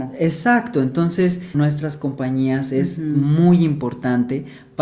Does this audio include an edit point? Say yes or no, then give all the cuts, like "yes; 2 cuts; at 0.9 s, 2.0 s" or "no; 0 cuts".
yes; 1 cut; at 1.5 s